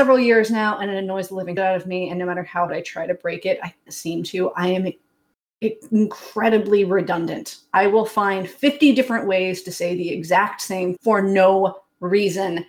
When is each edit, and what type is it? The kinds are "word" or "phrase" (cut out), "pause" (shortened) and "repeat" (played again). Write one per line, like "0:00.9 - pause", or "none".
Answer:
0:01.6 - word
0:02.7 - word
0:03.9 - word
0:11.0 - word